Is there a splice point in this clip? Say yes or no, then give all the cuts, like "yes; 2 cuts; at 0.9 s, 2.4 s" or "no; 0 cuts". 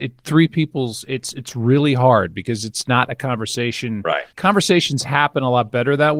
yes; 1 cut; at 4.3 s